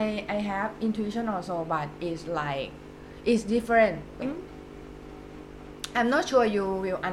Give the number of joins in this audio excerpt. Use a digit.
1